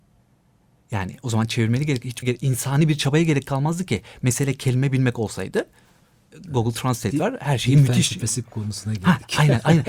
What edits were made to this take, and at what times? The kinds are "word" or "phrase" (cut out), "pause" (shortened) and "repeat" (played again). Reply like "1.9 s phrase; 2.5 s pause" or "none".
2.2 s word

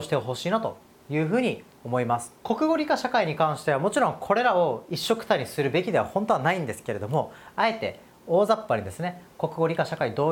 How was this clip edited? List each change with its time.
2.4 s pause

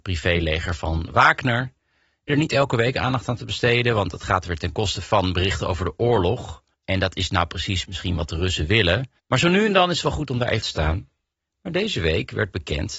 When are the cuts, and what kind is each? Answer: 2.3 s word; 6.7 s pause; 9.2 s pause; 10.6 s phrase

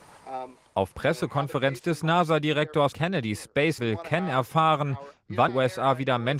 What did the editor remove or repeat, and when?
0.9 s word; 2.9 s word; 3.8 s word; 5.5 s word

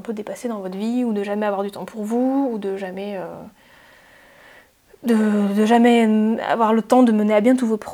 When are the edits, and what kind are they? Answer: none

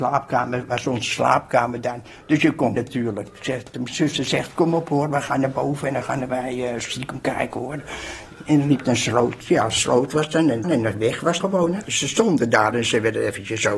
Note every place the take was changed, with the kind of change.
2.8 s word; 10.6 s word; 11.4 s word

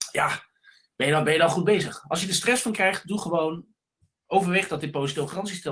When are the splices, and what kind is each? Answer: none

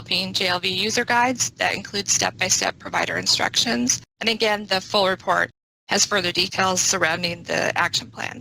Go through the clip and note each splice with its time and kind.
none

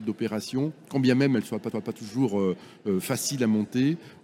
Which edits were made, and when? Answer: 1.7 s repeat

